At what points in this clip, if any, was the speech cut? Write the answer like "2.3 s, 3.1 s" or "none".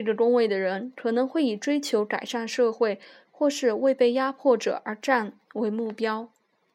none